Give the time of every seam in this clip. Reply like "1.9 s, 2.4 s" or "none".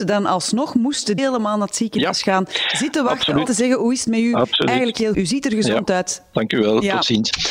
1.2 s, 3.4 s, 5.1 s